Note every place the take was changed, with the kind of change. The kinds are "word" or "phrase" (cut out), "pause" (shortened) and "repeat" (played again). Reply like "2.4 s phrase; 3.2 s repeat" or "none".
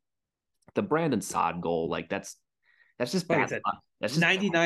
none